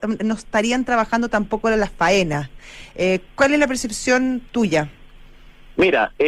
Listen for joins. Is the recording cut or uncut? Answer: cut